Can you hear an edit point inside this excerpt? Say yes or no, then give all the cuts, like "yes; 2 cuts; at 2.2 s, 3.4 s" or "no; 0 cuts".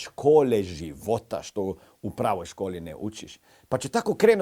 no; 0 cuts